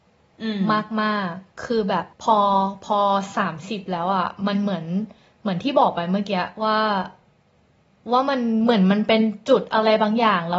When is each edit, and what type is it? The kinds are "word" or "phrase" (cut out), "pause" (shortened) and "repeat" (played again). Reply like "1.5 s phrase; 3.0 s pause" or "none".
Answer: 1.6 s word; 2.1 s pause